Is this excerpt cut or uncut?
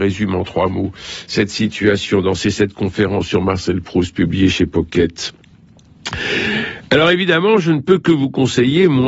uncut